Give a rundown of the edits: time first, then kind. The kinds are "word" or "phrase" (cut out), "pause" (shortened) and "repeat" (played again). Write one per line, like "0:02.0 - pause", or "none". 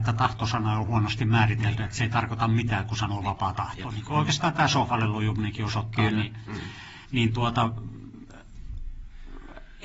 0:07.0 - pause